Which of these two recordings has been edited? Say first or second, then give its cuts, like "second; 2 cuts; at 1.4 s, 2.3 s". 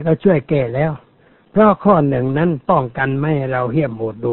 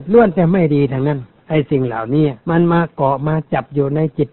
second; 1 cut; at 2.4 s